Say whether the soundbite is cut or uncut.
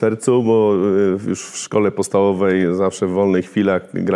uncut